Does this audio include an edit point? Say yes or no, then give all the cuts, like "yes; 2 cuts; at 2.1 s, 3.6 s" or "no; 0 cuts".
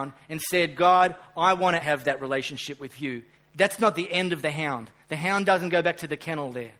yes; 2 cuts; at 1.8 s, 3.3 s